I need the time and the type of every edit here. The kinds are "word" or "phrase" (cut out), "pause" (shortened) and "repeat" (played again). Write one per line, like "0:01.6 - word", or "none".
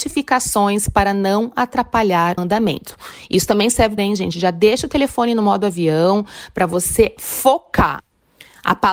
0:02.4 - word
0:04.0 - phrase